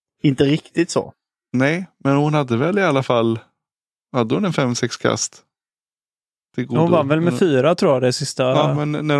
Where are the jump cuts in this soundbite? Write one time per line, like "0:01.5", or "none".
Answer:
none